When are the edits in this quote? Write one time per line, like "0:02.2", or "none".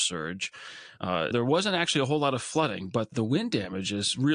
0:01.3
0:03.1